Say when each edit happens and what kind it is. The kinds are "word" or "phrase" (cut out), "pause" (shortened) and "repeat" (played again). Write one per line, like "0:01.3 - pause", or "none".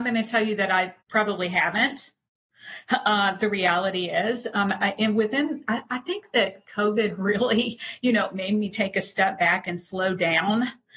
0:01.0 - pause

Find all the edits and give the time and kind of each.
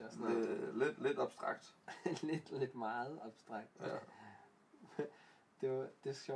0:01.8 - pause

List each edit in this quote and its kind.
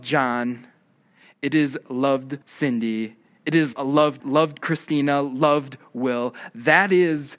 0:02.4 - pause
0:03.7 - phrase
0:04.2 - word

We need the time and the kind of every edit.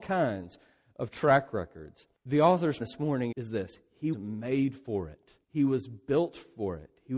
0:02.1 - pause
0:02.8 - phrase
0:03.3 - word
0:04.1 - word
0:05.4 - pause

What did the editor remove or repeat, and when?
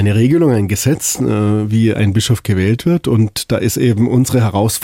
none

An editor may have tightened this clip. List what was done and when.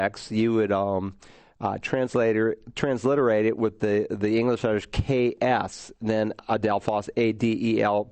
none

